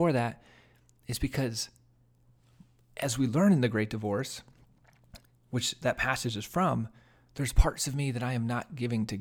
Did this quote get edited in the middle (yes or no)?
no